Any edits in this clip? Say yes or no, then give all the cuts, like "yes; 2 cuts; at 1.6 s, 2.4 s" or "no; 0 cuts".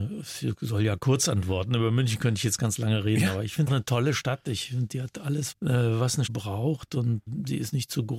yes; 3 cuts; at 3.7 s, 5.5 s, 6.3 s